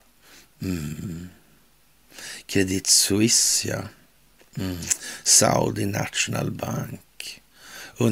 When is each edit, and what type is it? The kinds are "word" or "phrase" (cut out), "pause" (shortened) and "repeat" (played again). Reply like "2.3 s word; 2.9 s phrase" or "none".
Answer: none